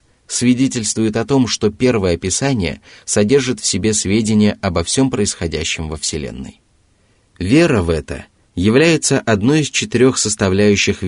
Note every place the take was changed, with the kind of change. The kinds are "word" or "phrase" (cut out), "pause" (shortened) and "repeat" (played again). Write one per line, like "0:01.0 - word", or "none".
none